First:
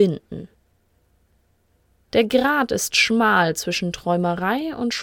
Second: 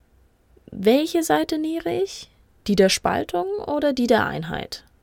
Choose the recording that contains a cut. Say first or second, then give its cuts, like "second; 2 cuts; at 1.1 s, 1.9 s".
second; 1 cut; at 2.5 s